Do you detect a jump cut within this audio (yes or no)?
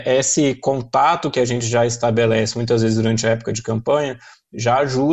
no